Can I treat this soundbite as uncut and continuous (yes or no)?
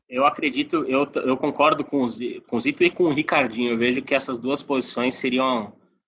yes